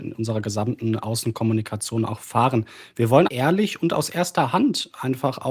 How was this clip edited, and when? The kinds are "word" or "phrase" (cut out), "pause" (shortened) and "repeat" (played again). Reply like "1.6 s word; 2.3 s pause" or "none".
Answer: 3.3 s word